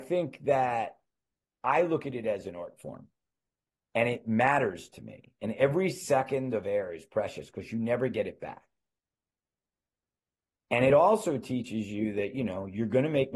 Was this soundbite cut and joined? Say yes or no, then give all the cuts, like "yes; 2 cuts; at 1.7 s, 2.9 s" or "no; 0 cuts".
no; 0 cuts